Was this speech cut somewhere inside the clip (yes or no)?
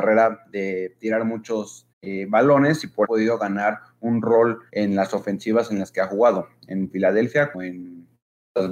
yes